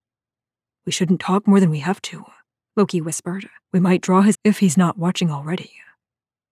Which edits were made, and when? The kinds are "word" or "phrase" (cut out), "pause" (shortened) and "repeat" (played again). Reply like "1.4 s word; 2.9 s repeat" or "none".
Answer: 3.6 s pause; 4.3 s word